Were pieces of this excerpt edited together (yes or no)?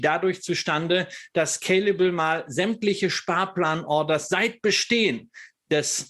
no